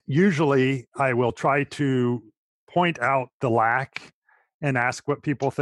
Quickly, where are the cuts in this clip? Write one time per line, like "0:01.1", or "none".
none